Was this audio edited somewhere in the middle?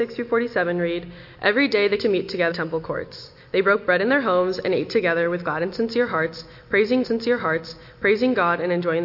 yes; 3 cuts; at 2.0 s, 2.5 s, 7.0 s

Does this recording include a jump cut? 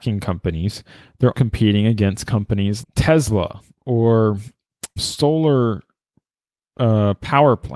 yes; 3 cuts; at 1.3 s, 2.8 s, 5.0 s

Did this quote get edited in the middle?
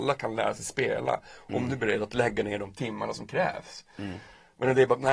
no; 0 cuts

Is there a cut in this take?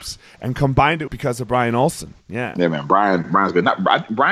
yes; 1 cut; at 1.1 s

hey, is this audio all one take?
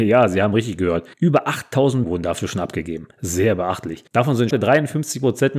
no; 4 cuts; at 1.1 s, 2.0 s, 4.1 s, 4.5 s

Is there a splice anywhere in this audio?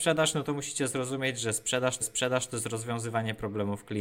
yes; 1 cut; at 2.0 s

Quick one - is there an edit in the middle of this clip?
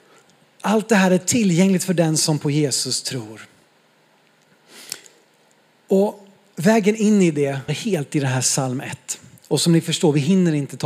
yes; 1 cut; at 7.7 s

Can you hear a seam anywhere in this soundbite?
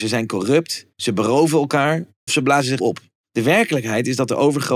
yes; 4 cuts; at 0.9 s, 2.3 s, 2.8 s, 3.2 s

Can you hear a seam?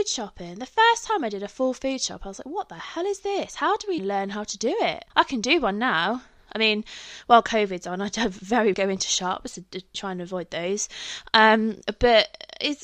yes; 4 cuts; at 4.0 s, 5.1 s, 8.7 s, 9.9 s

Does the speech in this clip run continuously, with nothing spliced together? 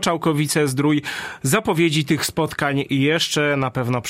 yes; 0 cuts

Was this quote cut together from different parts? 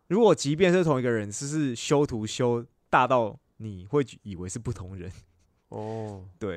no; 0 cuts

